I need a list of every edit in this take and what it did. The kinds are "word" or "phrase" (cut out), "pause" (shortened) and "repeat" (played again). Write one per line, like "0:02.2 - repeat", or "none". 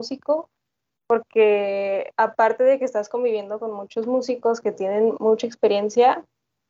0:02.1 - pause

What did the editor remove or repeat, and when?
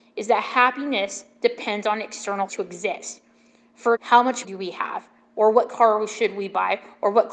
0:02.5 - word
0:04.0 - word
0:04.4 - word

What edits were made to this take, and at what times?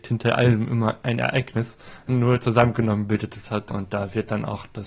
0:03.7 - word

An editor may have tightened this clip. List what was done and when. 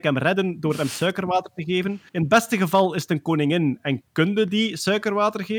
0:02.1 - pause

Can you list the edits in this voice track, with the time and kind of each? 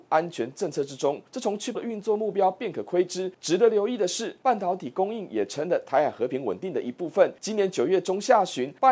0:01.7 - word

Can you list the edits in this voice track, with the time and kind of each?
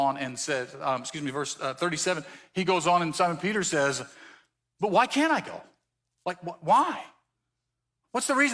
none

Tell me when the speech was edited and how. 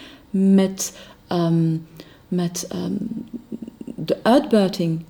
none

